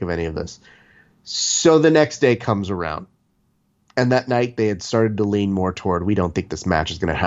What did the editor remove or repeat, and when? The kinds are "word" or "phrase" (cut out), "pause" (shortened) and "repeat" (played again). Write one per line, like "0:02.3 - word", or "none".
none